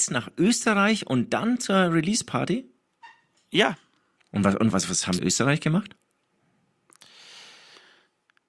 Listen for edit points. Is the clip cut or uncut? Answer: cut